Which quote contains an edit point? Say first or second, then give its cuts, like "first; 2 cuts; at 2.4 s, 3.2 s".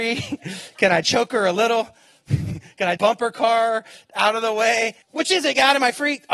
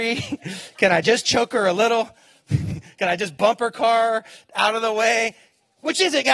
first; 3 cuts; at 1.0 s, 3.0 s, 5.0 s